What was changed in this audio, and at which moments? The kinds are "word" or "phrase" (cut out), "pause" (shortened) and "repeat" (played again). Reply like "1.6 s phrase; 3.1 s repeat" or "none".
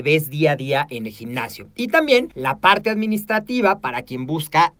2.3 s pause